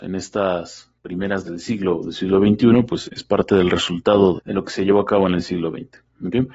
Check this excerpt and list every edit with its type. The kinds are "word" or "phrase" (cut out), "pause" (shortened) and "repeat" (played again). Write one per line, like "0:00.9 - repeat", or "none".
0:01.4 - word
0:03.0 - word
0:04.4 - word